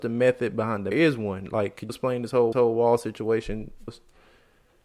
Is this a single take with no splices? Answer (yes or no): no